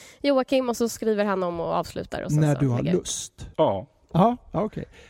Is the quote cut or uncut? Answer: cut